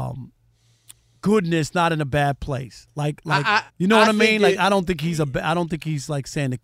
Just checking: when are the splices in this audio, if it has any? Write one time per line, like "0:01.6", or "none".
0:03.7